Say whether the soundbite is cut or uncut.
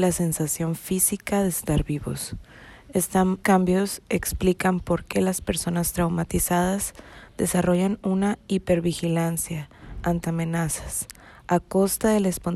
cut